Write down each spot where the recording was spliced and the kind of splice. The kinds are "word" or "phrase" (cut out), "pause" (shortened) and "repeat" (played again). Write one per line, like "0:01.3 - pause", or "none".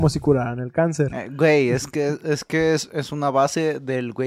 none